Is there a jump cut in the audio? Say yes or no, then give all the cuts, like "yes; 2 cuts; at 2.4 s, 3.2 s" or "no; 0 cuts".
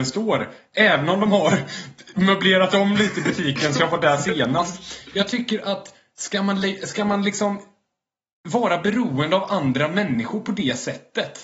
no; 0 cuts